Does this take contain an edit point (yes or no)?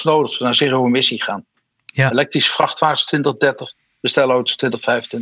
no